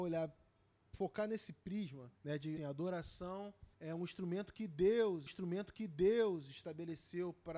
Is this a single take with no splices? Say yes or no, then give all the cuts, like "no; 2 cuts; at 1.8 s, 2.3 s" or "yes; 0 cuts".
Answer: no; 4 cuts; at 2.2 s, 2.6 s, 3.7 s, 5.3 s